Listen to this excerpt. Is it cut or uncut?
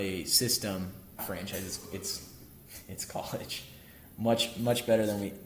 cut